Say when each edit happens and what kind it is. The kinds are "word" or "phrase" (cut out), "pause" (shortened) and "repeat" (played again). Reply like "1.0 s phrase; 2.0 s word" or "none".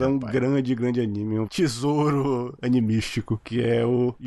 1.5 s word